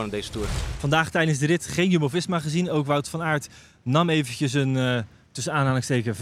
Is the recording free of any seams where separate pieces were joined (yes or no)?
yes